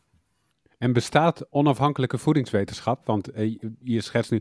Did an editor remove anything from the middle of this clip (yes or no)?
no